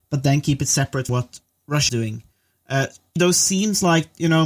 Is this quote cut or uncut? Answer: cut